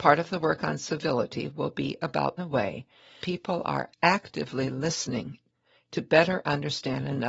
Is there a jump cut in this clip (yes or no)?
yes